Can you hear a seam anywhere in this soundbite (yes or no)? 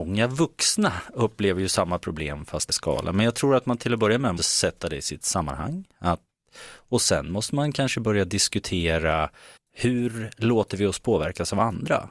yes